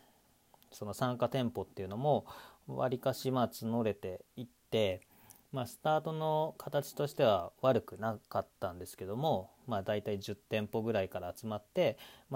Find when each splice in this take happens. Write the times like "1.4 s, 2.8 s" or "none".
4.3 s